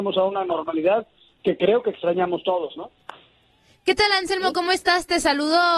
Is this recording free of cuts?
yes; 0 cuts

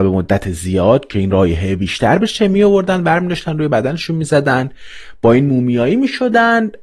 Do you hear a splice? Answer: no; 0 cuts

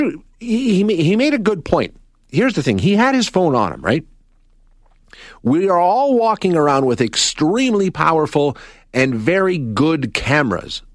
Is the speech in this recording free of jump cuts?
yes; 0 cuts

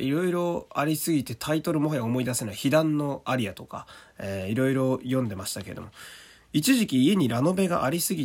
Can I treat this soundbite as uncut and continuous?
yes; 0 cuts

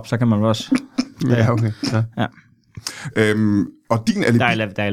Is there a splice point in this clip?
no; 0 cuts

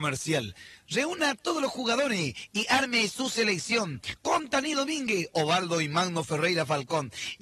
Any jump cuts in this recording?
no; 0 cuts

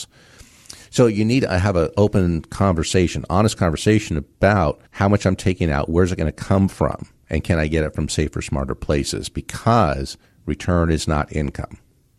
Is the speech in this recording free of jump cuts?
no; 2 cuts; at 4.9 s, 10.3 s

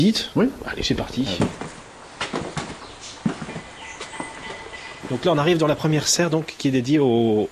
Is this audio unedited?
yes; 0 cuts

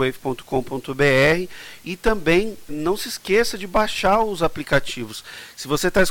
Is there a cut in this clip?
yes; 1 cut; at 2.7 s

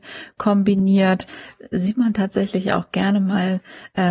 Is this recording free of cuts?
yes; 0 cuts

